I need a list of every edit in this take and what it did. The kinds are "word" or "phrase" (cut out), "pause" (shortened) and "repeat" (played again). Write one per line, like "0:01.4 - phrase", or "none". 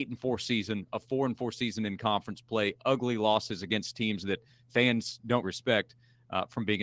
0:05.4 - word